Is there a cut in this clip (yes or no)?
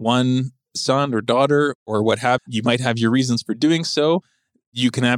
yes